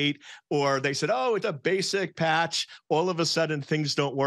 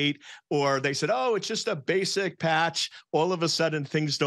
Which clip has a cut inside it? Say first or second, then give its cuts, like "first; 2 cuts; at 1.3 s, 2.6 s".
first; 1 cut; at 1.4 s